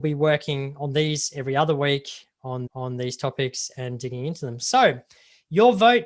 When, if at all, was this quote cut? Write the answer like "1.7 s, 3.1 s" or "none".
2.7 s

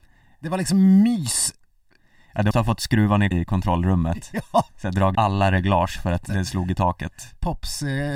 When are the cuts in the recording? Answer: 2.5 s, 3.3 s, 5.1 s, 6.3 s

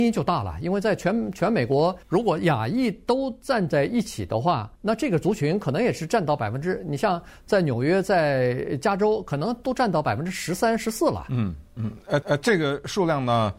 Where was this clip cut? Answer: 2.0 s, 4.8 s, 12.2 s

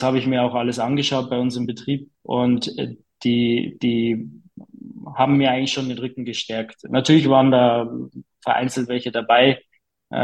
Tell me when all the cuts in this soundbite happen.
2.1 s

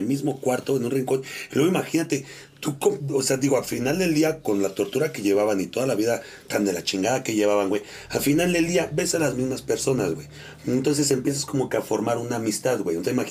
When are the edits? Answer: none

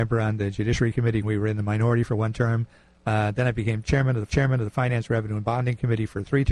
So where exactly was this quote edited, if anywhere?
1.2 s, 4.3 s

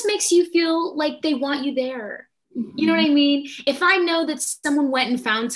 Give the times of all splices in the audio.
none

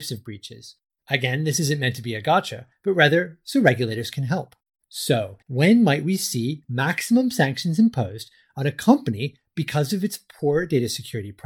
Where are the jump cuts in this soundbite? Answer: 5.4 s

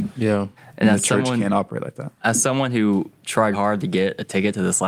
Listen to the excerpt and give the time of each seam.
3.5 s

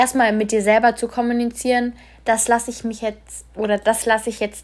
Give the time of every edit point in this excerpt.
none

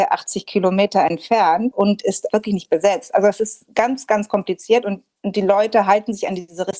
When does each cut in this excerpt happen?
none

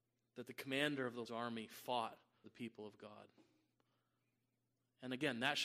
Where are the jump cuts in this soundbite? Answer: 1.2 s, 2.4 s

